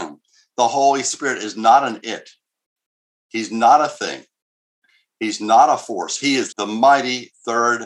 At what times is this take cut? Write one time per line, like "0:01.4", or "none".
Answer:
0:06.5

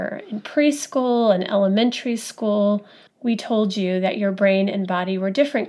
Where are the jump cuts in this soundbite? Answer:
none

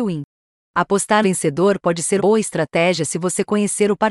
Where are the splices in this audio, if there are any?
0:01.2
0:02.2

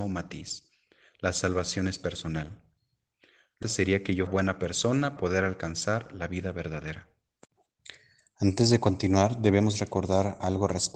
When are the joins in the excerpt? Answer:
0:03.6
0:04.3
0:05.2

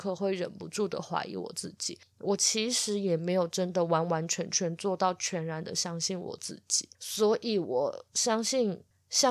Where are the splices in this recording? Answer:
0:06.9

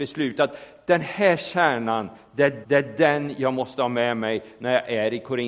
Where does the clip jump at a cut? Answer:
0:02.6

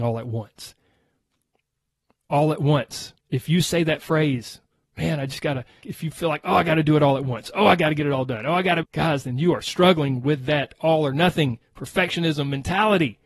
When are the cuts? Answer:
0:03.2
0:05.8
0:08.8

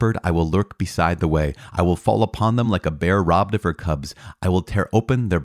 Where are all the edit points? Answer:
none

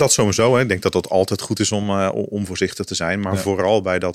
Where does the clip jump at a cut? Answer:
none

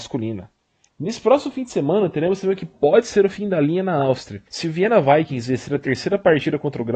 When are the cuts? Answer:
0:04.5

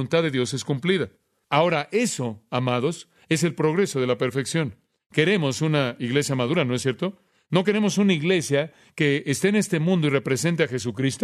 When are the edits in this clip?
none

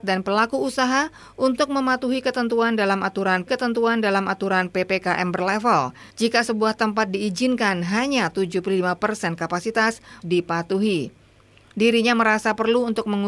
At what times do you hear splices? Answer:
0:03.5
0:06.1
0:10.2

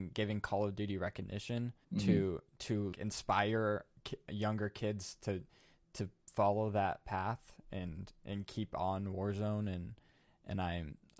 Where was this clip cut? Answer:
0:01.8
0:02.9

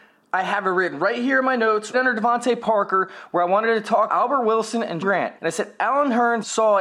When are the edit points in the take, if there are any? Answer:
0:01.9
0:04.1
0:05.0
0:05.4

